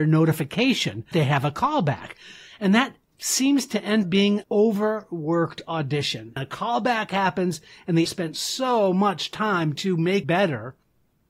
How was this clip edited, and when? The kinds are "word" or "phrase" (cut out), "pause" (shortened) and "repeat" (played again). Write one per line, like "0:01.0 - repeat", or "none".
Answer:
0:01.1 - word
0:03.1 - word
0:04.0 - word
0:04.4 - word
0:06.4 - word
0:08.1 - word
0:09.8 - word
0:10.2 - word